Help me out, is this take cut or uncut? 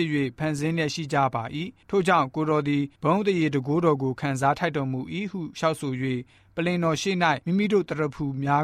cut